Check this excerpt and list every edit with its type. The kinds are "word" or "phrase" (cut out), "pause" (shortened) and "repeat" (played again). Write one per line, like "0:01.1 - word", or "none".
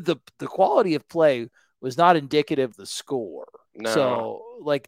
0:02.7 - word
0:03.7 - pause